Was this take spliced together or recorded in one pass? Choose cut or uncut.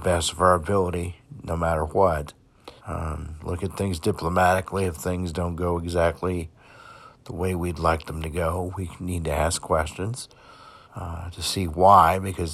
cut